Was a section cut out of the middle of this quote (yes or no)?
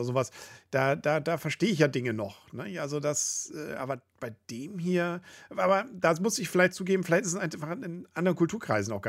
no